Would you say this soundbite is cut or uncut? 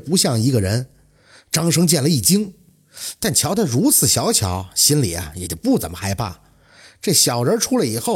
uncut